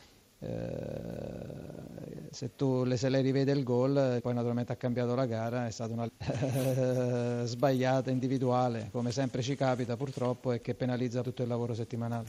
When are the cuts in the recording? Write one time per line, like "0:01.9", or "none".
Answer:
0:04.2
0:06.1
0:11.2